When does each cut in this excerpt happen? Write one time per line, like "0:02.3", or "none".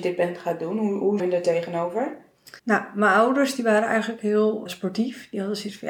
0:01.2
0:02.6
0:04.7